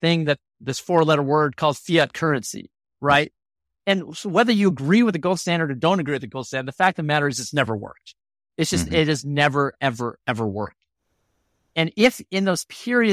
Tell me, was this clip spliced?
no; 0 cuts

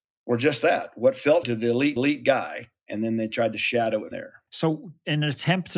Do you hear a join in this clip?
yes; 4 cuts; at 1.4 s, 2.0 s, 4.1 s, 4.5 s

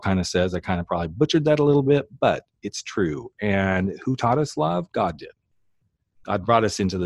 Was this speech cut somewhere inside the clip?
no; 0 cuts

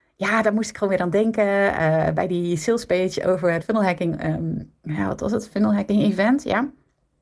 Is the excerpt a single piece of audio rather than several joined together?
no; 1 cut; at 3.6 s

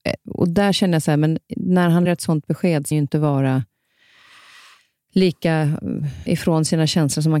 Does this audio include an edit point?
yes; 3 cuts; at 2.1 s, 2.9 s, 6.3 s

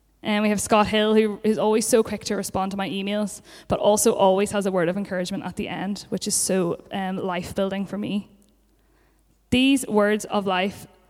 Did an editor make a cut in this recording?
no; 0 cuts

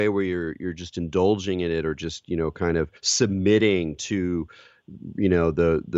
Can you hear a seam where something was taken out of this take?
yes; 1 cut; at 3.0 s

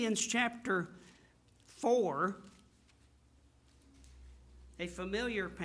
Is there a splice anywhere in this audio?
no; 0 cuts

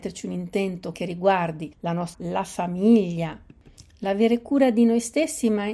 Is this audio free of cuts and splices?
no; 3 cuts; at 0.9 s, 1.7 s, 2.1 s

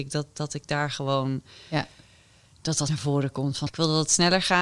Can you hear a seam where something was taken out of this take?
yes; 2 cuts; at 2.9 s, 3.7 s

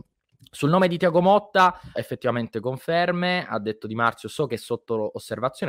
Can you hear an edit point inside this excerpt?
yes; 1 cut; at 2.0 s

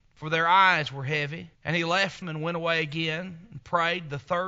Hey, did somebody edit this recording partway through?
yes; 2 cuts; at 1.5 s, 2.2 s

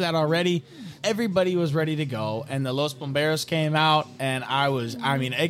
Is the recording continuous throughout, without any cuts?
no; 1 cut; at 1.0 s

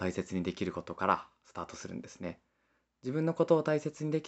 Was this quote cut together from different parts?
no; 0 cuts

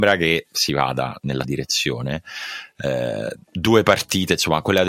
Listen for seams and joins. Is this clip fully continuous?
no; 2 cuts; at 1.4 s, 3.4 s

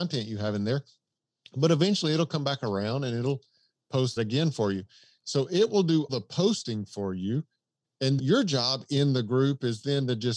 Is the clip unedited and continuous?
no; 3 cuts; at 4.2 s, 6.1 s, 8.2 s

